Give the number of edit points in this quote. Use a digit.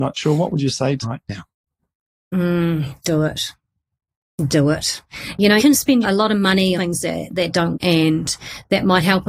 5